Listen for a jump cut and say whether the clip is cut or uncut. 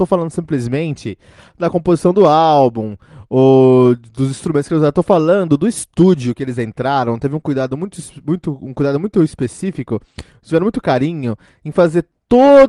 uncut